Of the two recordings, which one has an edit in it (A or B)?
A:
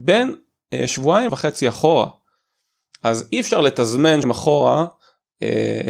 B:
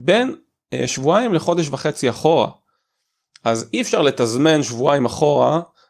A